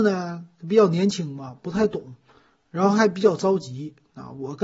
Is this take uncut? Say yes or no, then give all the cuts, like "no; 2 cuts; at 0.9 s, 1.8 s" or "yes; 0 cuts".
yes; 0 cuts